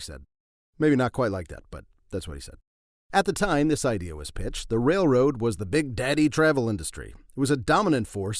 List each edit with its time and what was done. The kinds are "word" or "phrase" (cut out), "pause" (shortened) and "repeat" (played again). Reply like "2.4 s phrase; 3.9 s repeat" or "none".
none

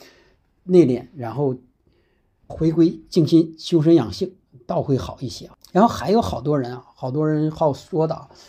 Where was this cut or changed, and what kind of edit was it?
2.5 s word

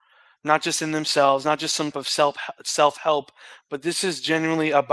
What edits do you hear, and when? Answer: 1.9 s word; 3.6 s word

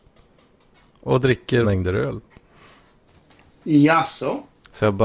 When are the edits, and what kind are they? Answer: 1.6 s word

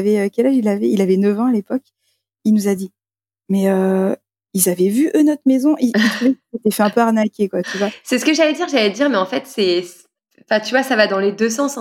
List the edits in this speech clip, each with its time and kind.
none

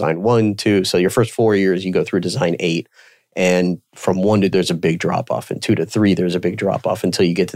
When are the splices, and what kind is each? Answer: 4.5 s word

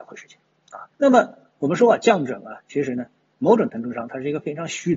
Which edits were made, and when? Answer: 0.9 s pause

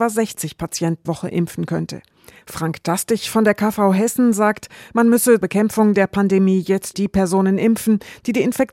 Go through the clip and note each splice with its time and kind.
1.0 s phrase; 5.4 s word; 6.9 s word

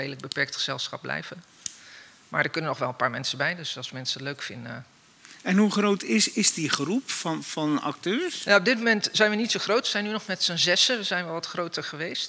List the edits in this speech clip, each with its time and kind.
none

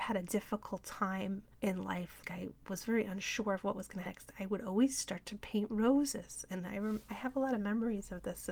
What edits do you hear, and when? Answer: 1.5 s pause; 2.2 s word; 4.1 s phrase

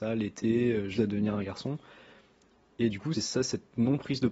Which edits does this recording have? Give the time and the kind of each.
1.0 s word; 3.1 s word

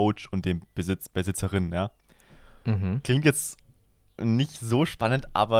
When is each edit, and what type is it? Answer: none

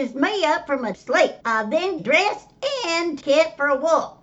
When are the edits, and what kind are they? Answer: 0.9 s word; 1.4 s pause; 2.0 s word; 3.2 s phrase

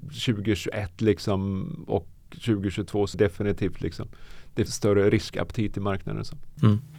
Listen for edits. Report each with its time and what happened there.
3.1 s word; 4.7 s word

